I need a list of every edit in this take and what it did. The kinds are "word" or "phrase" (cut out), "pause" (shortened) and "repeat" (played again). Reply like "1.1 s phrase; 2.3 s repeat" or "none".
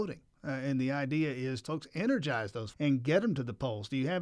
1.7 s phrase; 2.7 s word